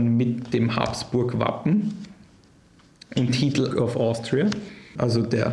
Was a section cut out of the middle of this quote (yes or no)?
yes